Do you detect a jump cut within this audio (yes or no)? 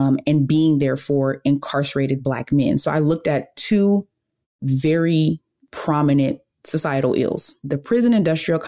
no